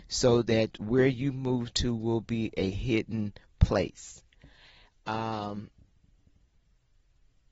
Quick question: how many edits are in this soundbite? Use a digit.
0